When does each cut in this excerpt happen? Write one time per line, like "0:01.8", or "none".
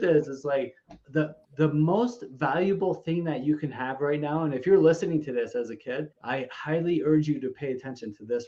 0:01.4
0:06.1

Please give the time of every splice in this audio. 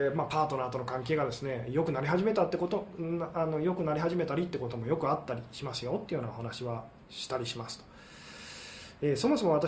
0:07.0

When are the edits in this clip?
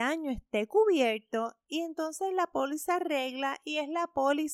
none

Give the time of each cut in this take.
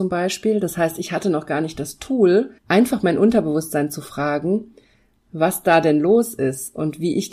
0:02.6

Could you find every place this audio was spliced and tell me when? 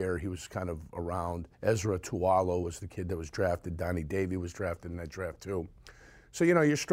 0:01.5

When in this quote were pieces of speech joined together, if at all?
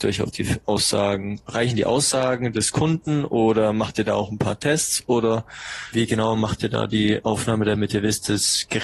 0:05.9

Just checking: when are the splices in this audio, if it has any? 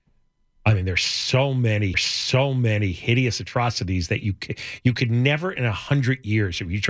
0:01.9

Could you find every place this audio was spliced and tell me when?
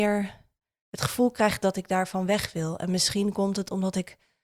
none

